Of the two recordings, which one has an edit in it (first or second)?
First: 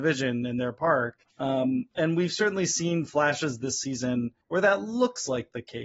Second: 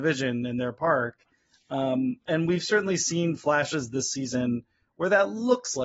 first